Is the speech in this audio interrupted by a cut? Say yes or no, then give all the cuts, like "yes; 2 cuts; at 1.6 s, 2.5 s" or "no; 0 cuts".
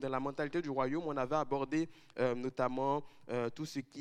no; 0 cuts